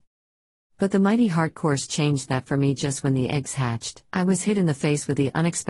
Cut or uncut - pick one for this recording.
cut